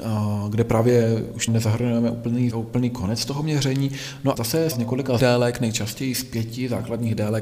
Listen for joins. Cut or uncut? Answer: cut